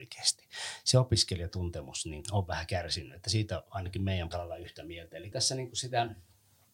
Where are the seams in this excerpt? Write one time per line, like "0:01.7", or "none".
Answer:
0:02.2
0:04.3
0:05.3

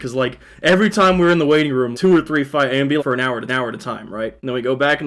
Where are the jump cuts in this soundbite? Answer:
0:01.9
0:03.0
0:03.5

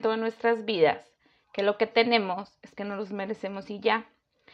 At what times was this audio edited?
0:02.8

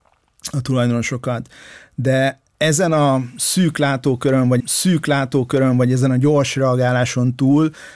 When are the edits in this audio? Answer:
0:04.6

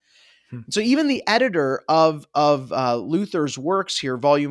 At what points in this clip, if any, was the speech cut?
none

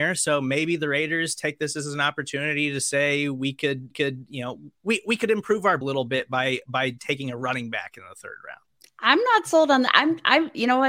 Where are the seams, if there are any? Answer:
0:03.9
0:05.8

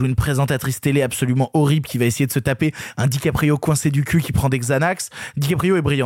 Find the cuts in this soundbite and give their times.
none

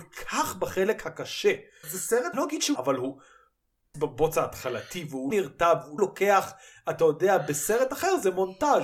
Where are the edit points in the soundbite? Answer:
0:01.8
0:02.3
0:02.8
0:03.9
0:05.3
0:06.0

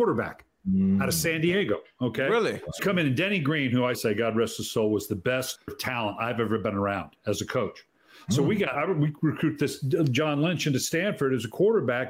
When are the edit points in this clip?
0:02.8
0:03.9
0:05.7
0:08.7

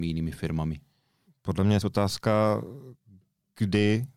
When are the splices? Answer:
0:01.8

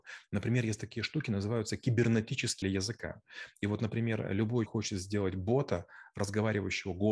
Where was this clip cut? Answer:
0:02.6
0:04.7

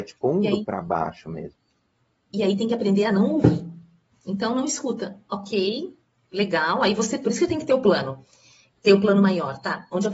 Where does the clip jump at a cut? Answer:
none

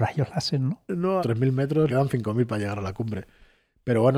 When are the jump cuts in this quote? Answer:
0:01.2
0:01.9

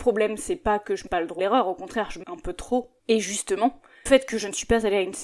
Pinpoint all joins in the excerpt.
0:01.1
0:01.4
0:02.2
0:03.0
0:04.1

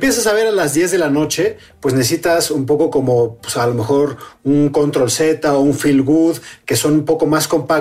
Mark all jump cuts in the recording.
none

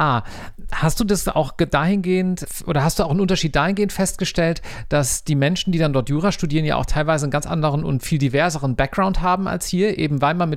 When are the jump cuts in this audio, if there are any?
none

